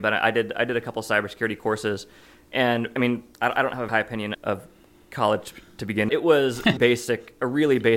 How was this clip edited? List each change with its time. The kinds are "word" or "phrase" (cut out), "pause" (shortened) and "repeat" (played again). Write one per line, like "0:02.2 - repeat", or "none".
0:03.0 - word
0:03.3 - pause
0:03.9 - word
0:04.3 - word
0:06.1 - phrase
0:06.8 - word